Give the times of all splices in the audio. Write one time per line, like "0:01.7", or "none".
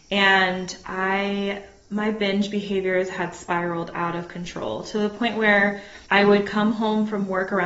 0:06.1